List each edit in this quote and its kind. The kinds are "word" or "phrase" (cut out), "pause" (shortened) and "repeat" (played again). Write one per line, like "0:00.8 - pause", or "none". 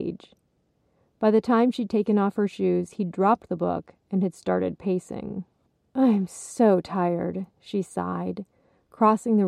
0:05.7 - pause
0:07.5 - pause